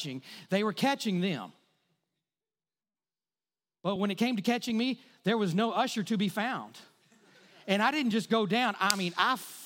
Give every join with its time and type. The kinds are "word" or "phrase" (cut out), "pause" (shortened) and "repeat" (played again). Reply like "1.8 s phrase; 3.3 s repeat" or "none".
none